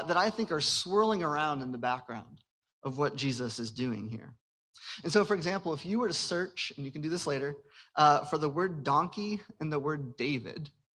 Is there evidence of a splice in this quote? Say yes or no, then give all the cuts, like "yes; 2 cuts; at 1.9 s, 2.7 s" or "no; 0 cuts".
no; 0 cuts